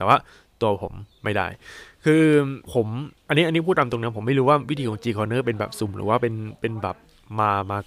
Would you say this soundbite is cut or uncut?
cut